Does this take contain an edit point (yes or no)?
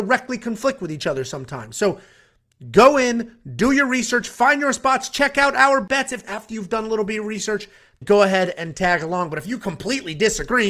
yes